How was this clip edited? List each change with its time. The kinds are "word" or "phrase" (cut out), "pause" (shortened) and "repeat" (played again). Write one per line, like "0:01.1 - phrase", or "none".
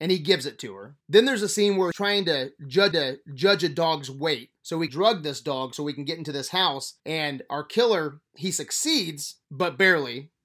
0:01.0 - pause
0:01.9 - word
0:02.9 - repeat
0:04.6 - pause
0:04.9 - word
0:07.0 - pause
0:08.3 - pause
0:09.4 - pause